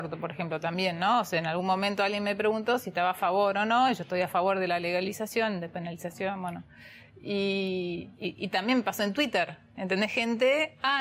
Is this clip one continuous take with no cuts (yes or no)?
yes